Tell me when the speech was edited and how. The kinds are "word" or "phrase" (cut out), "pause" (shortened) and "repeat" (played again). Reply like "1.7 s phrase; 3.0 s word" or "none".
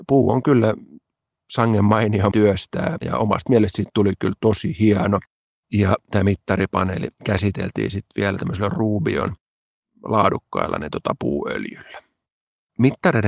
2.3 s phrase; 3.0 s word